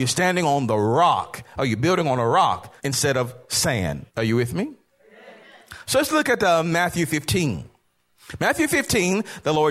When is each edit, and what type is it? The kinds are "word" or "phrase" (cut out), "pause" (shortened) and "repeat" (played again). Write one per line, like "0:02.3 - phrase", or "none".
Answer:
0:02.8 - pause
0:04.1 - pause